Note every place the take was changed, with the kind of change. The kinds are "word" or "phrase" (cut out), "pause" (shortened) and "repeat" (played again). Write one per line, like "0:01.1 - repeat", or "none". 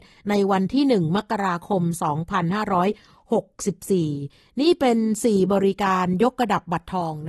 none